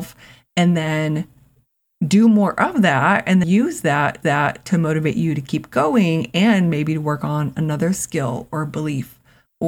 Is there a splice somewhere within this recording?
yes; 2 cuts; at 3.4 s, 4.2 s

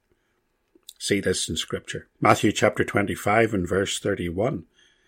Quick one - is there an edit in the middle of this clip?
yes; 1 cut; at 2.1 s

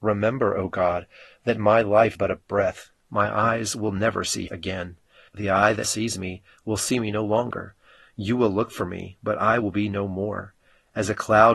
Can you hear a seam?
yes; 3 cuts; at 2.1 s, 4.5 s, 5.8 s

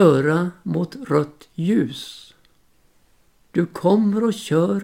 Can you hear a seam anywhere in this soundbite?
no; 0 cuts

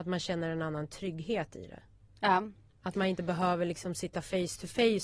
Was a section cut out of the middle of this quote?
no; 0 cuts

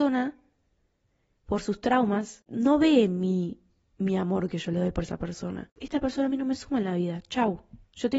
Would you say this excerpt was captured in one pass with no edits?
yes; 0 cuts

